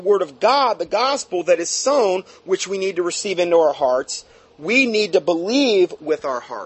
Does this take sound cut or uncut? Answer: uncut